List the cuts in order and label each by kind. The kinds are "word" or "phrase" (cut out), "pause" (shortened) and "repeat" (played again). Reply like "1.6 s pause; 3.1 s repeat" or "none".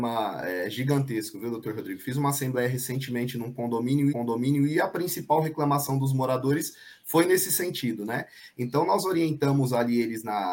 4.1 s repeat